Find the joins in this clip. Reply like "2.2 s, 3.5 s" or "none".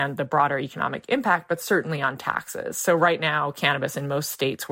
none